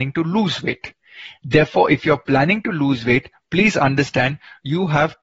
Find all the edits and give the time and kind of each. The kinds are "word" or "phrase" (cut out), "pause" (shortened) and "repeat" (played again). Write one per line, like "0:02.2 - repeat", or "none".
none

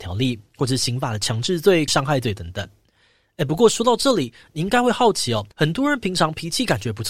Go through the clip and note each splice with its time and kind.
0:01.9 - phrase
0:05.5 - pause

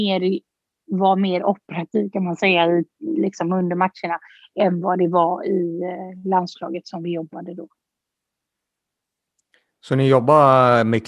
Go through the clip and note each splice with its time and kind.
none

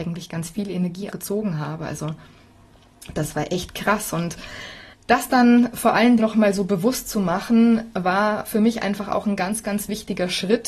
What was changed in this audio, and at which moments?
0:01.1 - word
0:04.9 - pause
0:06.2 - phrase

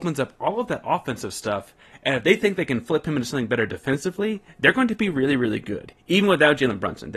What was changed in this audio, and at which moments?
none

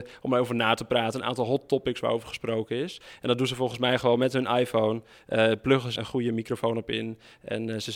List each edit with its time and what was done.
0:06.0 - word

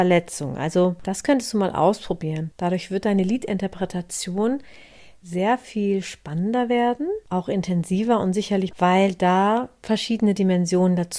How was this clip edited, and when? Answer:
0:08.7 - phrase

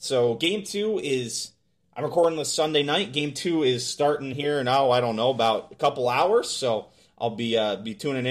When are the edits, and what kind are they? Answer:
none

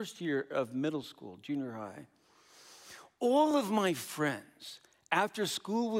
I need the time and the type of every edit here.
none

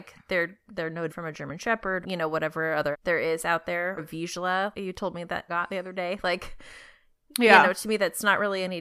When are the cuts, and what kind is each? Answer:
0:01.1 - word
0:02.0 - word
0:02.9 - word
0:04.0 - word
0:04.7 - word
0:05.5 - word

